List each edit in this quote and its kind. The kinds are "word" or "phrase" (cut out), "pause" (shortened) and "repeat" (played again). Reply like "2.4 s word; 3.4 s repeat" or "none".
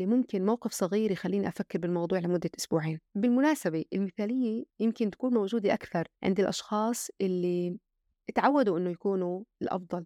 3.1 s pause; 4.7 s pause; 6.1 s pause